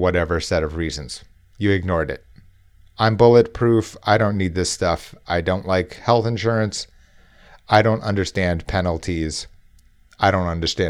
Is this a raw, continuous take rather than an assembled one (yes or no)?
yes